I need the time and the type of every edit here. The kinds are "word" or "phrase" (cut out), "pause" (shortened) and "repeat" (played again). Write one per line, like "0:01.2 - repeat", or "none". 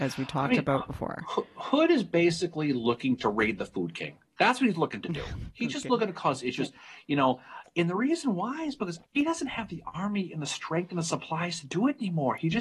0:09.1 - pause